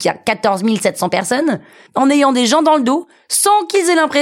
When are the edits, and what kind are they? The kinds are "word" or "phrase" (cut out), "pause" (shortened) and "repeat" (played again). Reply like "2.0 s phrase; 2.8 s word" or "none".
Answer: none